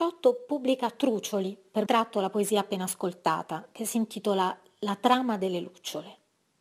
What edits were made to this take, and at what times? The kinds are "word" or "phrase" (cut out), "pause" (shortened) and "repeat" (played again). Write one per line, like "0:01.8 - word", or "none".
0:01.8 - phrase